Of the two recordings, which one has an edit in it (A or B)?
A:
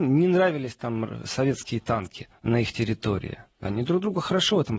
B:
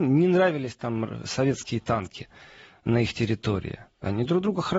A